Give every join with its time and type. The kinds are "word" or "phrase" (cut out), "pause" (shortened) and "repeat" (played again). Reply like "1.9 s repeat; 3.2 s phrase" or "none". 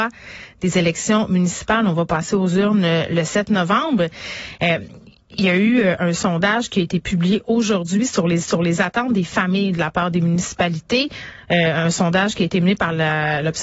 8.4 s repeat